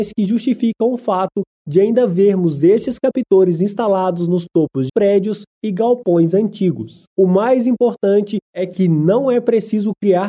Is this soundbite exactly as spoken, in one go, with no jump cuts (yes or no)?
no